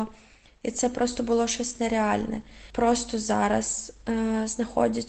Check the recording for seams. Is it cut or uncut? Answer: uncut